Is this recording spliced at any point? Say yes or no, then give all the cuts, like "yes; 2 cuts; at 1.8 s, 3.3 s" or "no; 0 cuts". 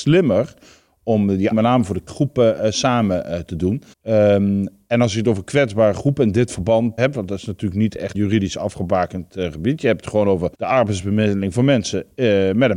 yes; 6 cuts; at 1.5 s, 2.1 s, 3.9 s, 7.0 s, 8.1 s, 10.5 s